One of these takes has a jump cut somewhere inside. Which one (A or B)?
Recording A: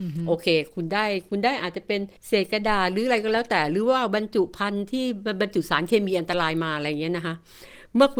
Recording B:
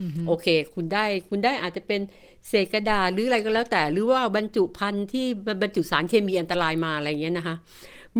A